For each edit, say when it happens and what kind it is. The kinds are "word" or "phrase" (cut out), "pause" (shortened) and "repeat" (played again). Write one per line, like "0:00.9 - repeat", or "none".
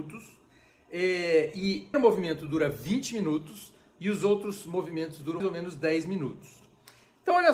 0:01.9 - phrase
0:05.4 - word